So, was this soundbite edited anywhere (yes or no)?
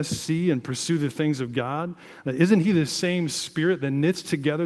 no